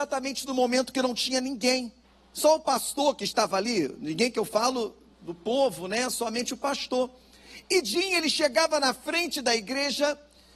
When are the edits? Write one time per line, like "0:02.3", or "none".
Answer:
0:02.0